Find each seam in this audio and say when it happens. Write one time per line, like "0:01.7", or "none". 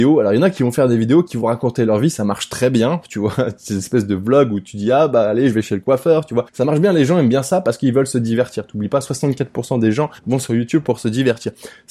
0:06.5
0:10.2